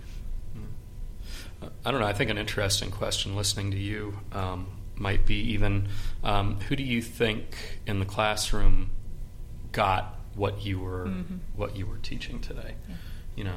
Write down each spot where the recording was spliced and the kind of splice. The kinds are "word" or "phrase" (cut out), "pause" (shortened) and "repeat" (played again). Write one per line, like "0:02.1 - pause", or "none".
none